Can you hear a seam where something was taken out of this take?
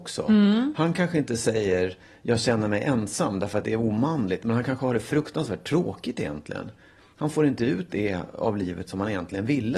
no; 0 cuts

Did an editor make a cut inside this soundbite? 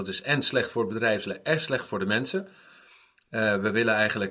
no; 0 cuts

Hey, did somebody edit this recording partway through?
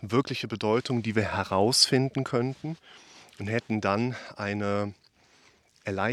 no; 0 cuts

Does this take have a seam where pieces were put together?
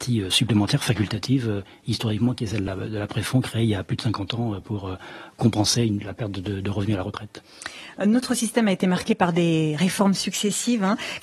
no; 0 cuts

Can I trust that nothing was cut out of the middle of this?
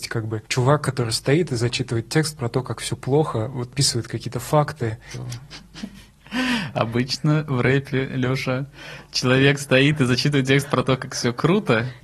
yes; 0 cuts

